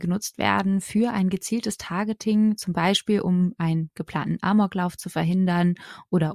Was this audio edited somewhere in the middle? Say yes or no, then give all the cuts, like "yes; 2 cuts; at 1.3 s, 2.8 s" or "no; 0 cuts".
no; 0 cuts